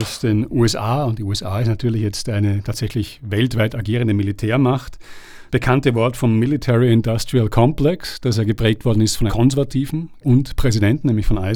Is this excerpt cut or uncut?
cut